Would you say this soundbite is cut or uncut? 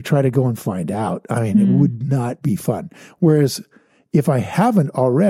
uncut